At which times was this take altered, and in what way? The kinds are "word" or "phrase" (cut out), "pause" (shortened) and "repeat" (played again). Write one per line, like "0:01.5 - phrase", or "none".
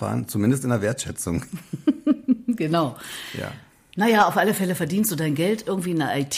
none